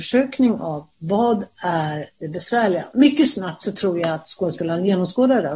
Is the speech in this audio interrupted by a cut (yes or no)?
no